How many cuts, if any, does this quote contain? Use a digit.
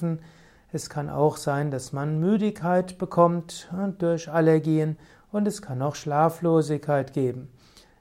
0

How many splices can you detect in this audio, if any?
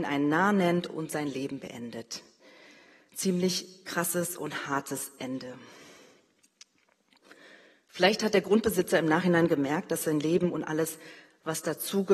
0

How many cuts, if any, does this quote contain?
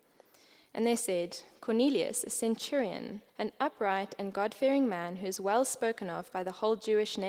1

